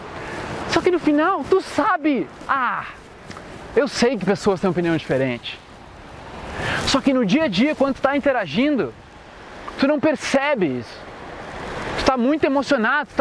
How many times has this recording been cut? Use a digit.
0